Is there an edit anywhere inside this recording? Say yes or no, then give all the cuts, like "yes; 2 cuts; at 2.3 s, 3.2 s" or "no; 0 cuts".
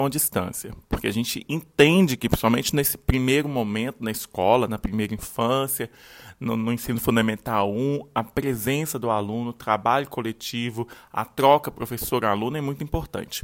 no; 0 cuts